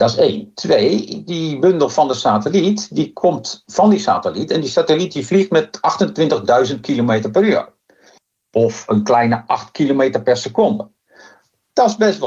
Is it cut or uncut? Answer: uncut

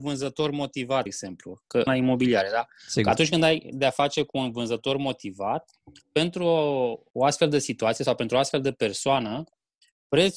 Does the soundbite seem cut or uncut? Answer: cut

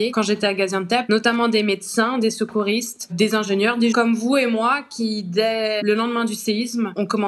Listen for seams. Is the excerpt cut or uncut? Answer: cut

